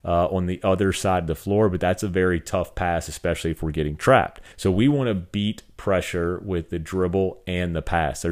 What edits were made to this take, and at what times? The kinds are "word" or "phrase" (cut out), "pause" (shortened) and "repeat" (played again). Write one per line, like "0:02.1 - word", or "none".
0:04.5 - pause